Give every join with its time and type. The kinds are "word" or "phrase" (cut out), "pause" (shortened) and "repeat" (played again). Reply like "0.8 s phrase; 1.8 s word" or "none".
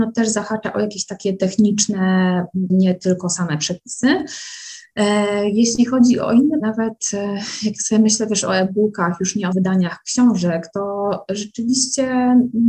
2.7 s phrase; 6.6 s word; 9.5 s word